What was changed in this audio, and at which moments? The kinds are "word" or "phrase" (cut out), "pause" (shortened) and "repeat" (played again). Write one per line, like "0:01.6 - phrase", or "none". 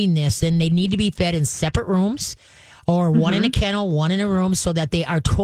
none